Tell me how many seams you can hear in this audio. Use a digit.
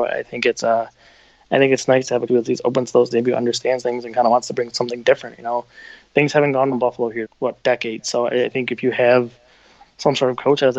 5